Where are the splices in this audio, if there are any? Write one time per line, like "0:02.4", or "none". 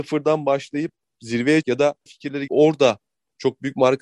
0:01.6
0:02.1
0:02.5